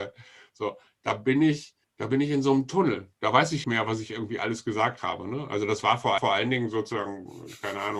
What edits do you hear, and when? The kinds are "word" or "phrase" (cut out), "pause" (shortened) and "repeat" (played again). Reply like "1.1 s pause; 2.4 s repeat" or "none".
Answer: 1.8 s pause; 3.6 s phrase; 6.2 s repeat